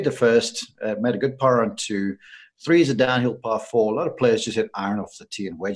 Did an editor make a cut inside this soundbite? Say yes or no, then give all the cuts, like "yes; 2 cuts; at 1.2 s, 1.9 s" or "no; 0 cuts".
no; 0 cuts